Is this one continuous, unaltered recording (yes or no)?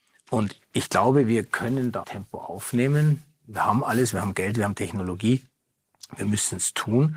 no